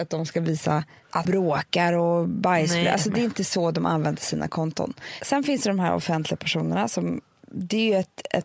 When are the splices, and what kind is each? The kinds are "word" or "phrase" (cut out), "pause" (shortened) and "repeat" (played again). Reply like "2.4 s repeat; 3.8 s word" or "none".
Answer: 1.3 s word